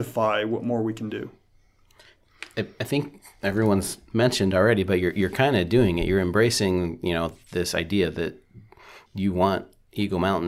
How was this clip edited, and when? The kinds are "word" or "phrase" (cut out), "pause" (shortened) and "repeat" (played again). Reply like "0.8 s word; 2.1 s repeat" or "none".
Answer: 9.1 s pause